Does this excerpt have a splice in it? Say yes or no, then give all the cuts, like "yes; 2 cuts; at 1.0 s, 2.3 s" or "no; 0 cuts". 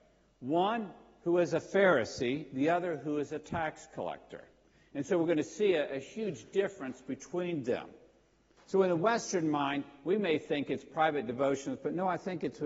no; 0 cuts